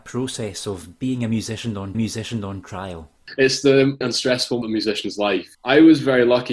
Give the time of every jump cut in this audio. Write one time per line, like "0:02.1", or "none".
0:01.9
0:04.0
0:04.6
0:05.5

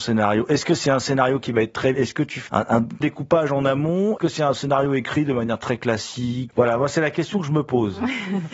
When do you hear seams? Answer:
0:01.9
0:02.5
0:03.0
0:04.2
0:06.5

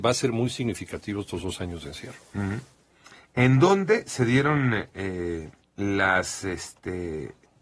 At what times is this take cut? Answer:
0:05.6

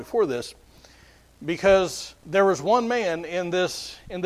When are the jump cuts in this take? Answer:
0:02.2

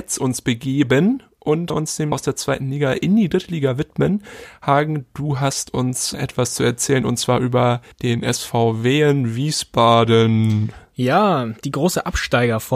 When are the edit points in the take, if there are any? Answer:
0:01.7
0:02.1
0:06.1
0:07.9

